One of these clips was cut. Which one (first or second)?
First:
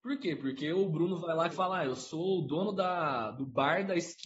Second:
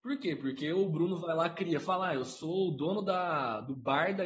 first